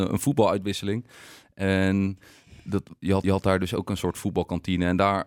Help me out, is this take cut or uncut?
cut